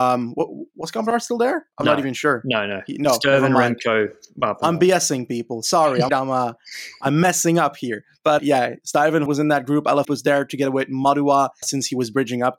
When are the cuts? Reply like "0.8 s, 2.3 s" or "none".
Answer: 6.1 s, 8.4 s, 9.3 s, 10.0 s, 11.6 s